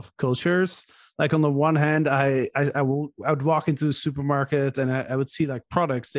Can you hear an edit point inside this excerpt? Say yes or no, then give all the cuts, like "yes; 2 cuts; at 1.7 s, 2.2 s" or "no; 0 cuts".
no; 0 cuts